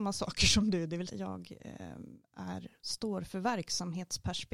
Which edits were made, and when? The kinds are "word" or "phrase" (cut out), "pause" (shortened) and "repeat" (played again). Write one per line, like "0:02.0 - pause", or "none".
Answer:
0:01.1 - word